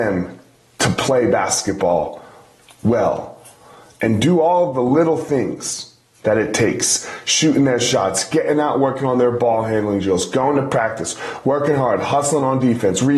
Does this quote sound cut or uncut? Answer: uncut